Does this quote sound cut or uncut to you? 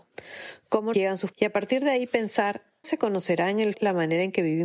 cut